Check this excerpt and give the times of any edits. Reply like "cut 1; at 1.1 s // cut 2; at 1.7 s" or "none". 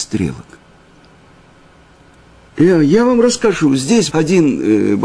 cut 1; at 4.1 s